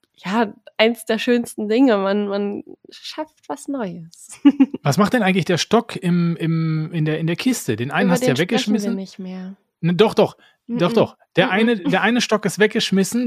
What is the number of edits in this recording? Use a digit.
0